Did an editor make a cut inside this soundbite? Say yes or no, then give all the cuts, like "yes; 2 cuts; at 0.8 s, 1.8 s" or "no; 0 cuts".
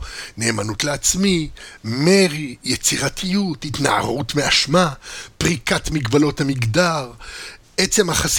no; 0 cuts